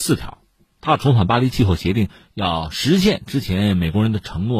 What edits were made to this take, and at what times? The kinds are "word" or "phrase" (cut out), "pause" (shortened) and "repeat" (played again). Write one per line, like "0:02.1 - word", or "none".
none